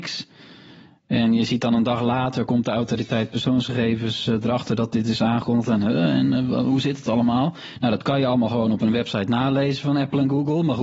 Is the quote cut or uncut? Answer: uncut